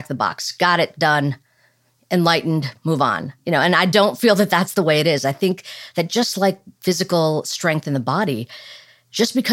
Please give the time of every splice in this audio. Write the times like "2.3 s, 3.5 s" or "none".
none